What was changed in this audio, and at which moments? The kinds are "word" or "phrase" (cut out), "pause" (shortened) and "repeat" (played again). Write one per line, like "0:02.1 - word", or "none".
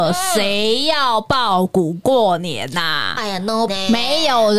0:03.7 - word